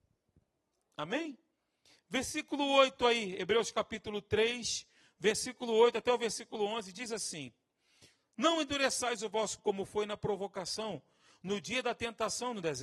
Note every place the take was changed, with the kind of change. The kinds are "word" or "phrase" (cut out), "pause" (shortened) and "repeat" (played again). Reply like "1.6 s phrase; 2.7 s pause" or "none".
9.6 s word